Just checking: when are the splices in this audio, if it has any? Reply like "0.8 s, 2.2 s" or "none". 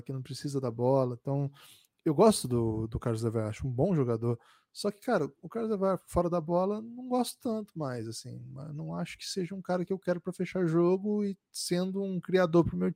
none